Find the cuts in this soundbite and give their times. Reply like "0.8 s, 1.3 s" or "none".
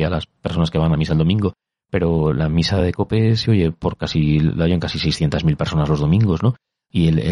none